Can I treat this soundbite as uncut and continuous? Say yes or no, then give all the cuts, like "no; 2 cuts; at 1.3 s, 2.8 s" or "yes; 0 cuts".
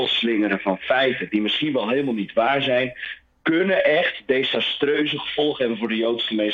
yes; 0 cuts